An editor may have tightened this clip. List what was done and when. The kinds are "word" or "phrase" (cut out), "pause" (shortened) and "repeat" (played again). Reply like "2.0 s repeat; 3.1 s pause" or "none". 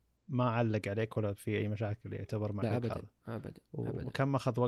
2.6 s word